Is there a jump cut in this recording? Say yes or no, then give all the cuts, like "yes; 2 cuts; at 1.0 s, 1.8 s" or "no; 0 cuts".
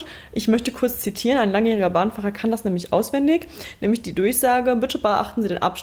no; 0 cuts